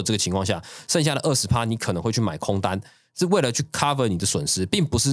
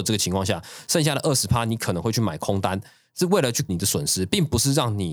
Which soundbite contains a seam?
second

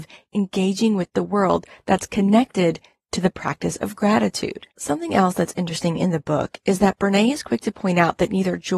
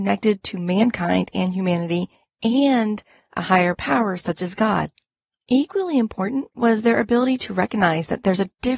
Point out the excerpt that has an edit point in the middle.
first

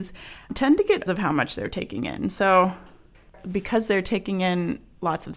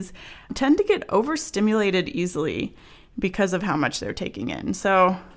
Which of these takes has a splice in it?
first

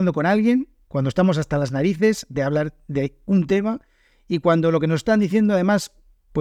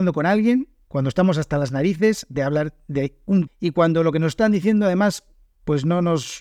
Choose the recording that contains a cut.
second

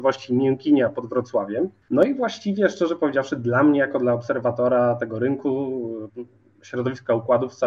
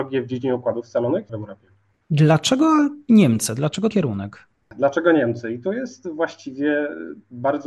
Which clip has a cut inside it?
second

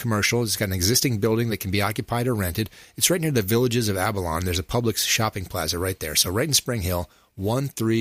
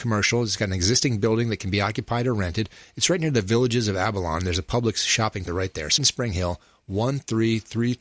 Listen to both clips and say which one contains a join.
second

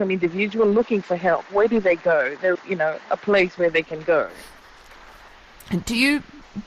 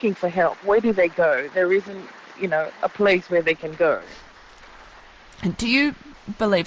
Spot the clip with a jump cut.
first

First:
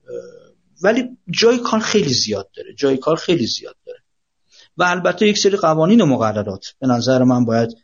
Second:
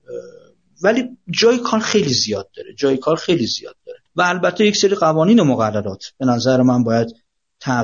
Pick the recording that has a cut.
second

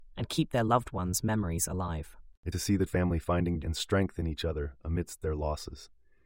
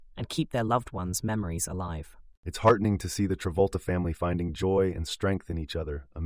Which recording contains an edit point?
first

